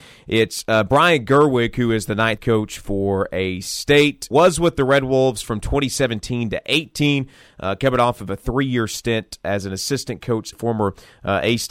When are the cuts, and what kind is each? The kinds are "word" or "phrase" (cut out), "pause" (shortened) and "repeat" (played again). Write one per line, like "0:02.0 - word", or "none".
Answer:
0:02.4 - word
0:04.3 - word
0:10.5 - phrase